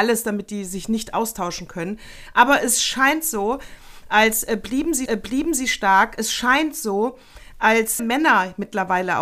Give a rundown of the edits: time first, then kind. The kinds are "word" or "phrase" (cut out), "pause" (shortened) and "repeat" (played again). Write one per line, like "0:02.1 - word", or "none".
0:05.1 - repeat
0:08.0 - phrase